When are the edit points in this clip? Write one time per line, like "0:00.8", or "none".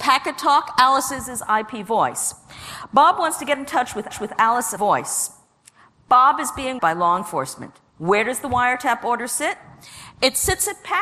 0:04.1
0:04.8
0:06.8
0:07.9